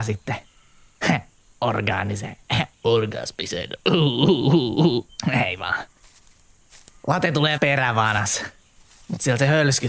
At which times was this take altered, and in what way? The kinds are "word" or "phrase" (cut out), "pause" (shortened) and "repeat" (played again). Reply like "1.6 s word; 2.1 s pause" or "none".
2.7 s pause; 7.6 s word